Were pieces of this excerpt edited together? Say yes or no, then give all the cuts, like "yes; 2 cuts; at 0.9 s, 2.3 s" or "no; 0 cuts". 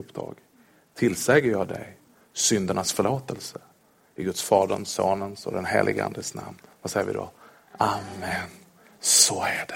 no; 0 cuts